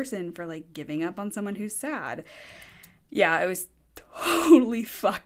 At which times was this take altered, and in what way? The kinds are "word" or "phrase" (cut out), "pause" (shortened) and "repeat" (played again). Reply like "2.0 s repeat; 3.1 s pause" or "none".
none